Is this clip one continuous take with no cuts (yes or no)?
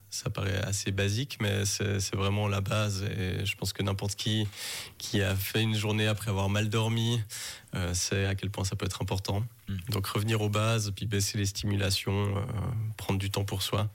yes